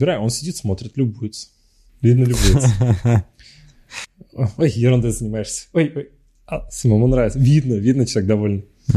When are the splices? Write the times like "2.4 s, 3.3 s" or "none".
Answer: none